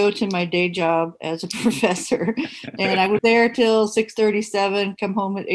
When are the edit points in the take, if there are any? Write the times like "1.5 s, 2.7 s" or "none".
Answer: 3.2 s